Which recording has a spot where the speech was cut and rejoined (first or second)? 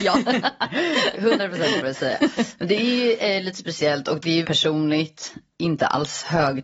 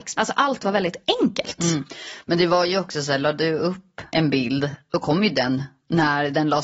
first